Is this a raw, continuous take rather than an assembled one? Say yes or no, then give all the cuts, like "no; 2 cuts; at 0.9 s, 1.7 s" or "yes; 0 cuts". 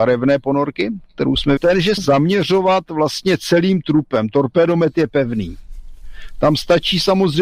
no; 2 cuts; at 1.6 s, 2.0 s